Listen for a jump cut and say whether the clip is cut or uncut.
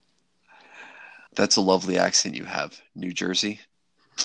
cut